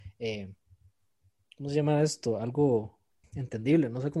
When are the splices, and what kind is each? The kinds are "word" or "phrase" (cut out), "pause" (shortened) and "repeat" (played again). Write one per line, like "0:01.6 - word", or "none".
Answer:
0:03.2 - word